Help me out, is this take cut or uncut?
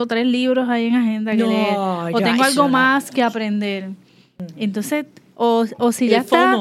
uncut